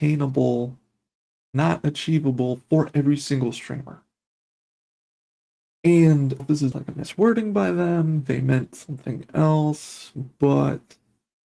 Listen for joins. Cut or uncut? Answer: cut